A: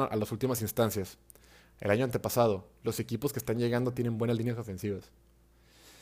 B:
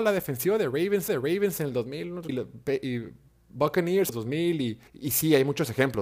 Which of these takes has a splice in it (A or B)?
B